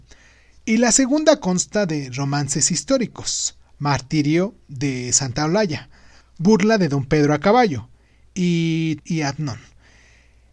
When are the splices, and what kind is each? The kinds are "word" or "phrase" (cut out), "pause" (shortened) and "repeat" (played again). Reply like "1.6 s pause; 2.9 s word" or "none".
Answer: 9.0 s word